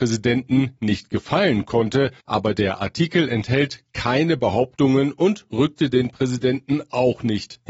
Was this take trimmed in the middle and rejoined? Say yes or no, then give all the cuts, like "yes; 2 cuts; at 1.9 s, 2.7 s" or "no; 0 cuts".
yes; 1 cut; at 2.2 s